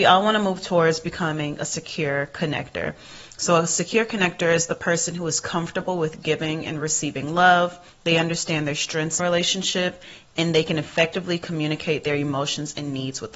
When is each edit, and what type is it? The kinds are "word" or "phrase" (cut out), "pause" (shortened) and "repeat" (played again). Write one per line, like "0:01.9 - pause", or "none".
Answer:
0:07.9 - pause
0:09.2 - phrase